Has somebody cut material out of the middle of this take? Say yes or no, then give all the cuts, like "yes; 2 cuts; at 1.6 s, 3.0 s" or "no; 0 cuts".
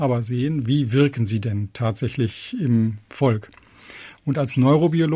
no; 0 cuts